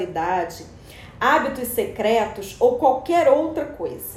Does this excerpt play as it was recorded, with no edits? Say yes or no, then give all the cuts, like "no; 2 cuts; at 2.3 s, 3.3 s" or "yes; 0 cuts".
yes; 0 cuts